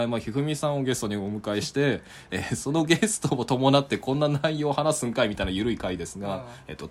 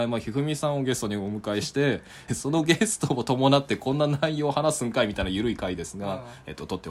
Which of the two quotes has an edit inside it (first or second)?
second